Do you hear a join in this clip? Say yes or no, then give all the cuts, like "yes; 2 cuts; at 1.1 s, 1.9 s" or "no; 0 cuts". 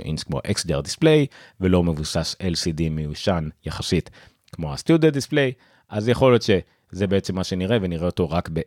no; 0 cuts